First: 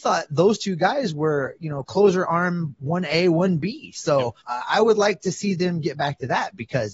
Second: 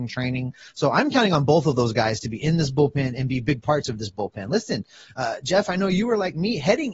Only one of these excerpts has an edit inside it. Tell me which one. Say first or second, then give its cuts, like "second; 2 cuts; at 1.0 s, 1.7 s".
first; 1 cut; at 4.4 s